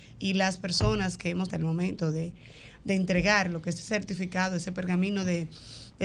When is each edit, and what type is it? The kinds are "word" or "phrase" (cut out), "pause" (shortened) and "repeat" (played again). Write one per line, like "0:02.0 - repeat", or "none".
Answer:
0:01.5 - phrase